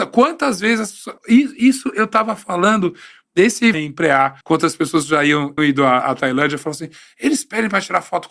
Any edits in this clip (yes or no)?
yes